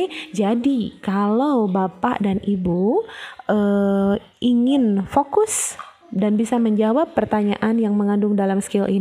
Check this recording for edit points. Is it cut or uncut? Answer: uncut